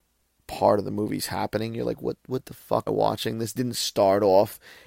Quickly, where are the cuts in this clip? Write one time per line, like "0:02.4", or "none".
0:02.9
0:03.6